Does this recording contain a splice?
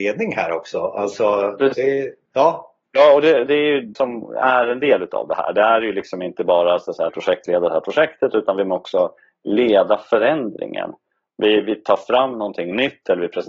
yes; 4 cuts; at 2.8 s, 3.5 s, 4.0 s, 7.1 s

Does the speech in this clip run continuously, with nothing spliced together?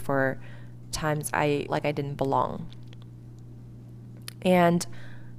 no; 2 cuts; at 0.9 s, 1.7 s

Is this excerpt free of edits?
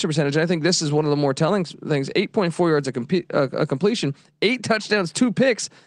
yes; 0 cuts

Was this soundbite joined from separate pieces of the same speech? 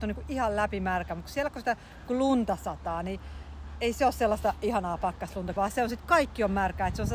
yes; 1 cut; at 5.6 s

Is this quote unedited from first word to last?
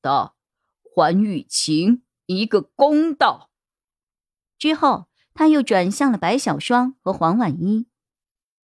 yes; 0 cuts

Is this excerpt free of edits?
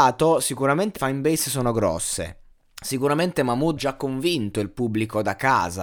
no; 3 cuts; at 1.0 s, 2.5 s, 3.8 s

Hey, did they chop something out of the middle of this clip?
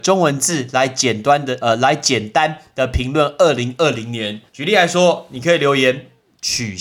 yes; 1 cut; at 4.5 s

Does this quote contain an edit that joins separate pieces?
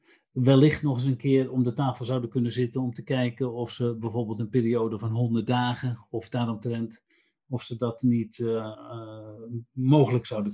no; 0 cuts

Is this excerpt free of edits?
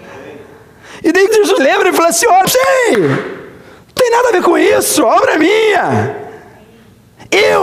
no; 4 cuts; at 1.3 s, 1.6 s, 2.4 s, 4.0 s

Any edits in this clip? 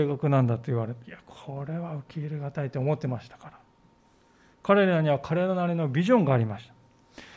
yes; 1 cut; at 1.0 s

